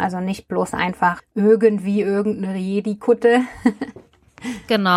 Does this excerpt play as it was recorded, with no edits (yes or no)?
no